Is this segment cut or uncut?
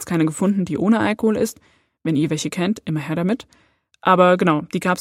uncut